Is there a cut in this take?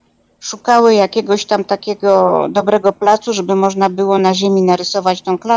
no; 0 cuts

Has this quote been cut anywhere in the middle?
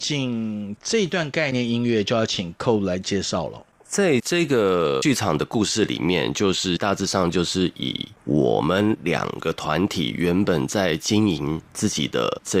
no; 0 cuts

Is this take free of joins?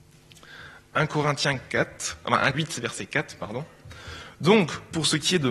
no; 1 cut; at 2.5 s

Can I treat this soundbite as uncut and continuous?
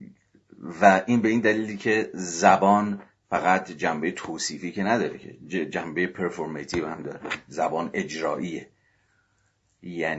yes; 0 cuts

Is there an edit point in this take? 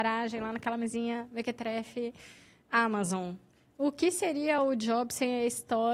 no; 0 cuts

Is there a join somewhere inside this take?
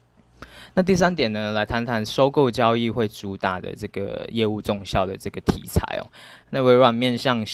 yes; 1 cut; at 6.4 s

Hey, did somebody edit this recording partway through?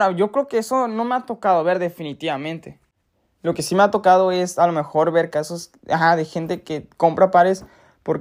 no; 0 cuts

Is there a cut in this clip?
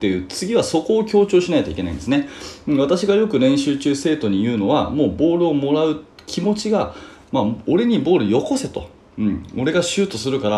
no; 0 cuts

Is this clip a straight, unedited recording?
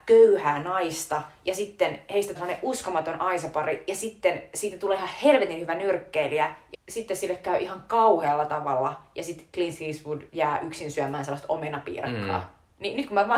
no; 3 cuts; at 2.4 s, 6.7 s, 10.3 s

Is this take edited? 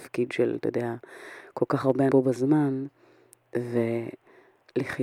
yes; 1 cut; at 2.1 s

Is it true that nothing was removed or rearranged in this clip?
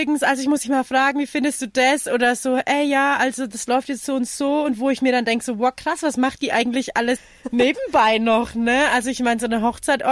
no; 1 cut; at 7.2 s

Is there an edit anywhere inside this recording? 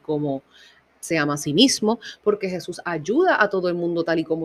no; 0 cuts

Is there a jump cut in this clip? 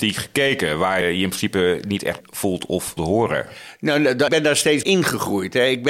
yes; 5 cuts; at 1.0 s, 2.2 s, 3.0 s, 4.3 s, 4.8 s

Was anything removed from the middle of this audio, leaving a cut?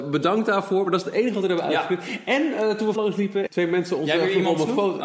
yes; 2 cuts; at 3.0 s, 3.5 s

